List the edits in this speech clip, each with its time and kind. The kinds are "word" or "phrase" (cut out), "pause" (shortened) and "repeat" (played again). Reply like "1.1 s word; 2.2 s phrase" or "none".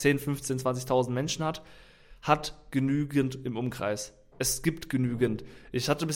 none

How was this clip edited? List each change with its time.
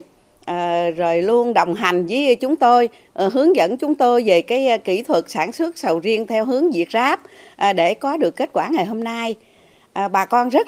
none

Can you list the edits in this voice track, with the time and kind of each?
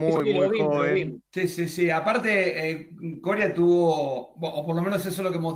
1.3 s pause

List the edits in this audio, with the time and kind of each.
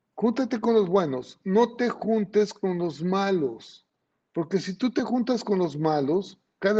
none

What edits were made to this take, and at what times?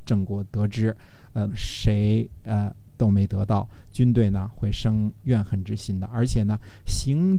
1.5 s phrase

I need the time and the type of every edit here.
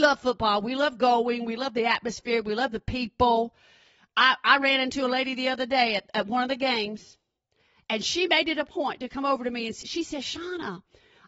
9.8 s word

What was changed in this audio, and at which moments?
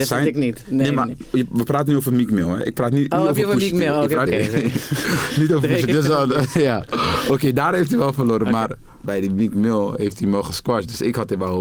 4.3 s word; 9.0 s word

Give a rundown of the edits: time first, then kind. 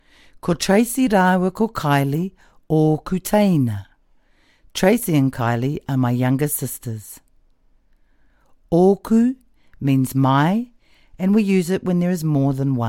none

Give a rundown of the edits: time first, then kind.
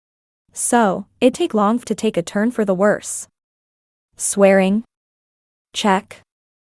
1.3 s word; 1.8 s word

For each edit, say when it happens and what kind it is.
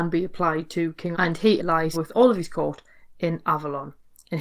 1.1 s word; 1.6 s word; 1.9 s word

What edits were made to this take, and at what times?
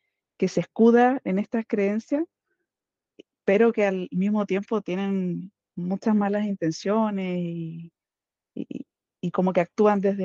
1.2 s word

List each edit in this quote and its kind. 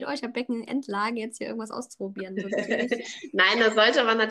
2.5 s word

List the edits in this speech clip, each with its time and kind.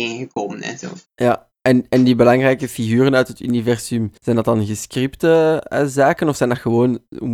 4.2 s pause

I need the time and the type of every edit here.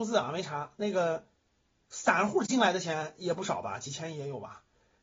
none

